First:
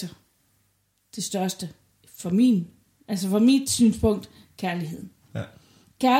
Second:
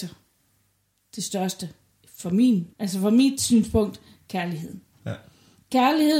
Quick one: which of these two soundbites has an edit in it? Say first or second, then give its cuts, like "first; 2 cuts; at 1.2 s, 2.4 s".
second; 1 cut; at 2.7 s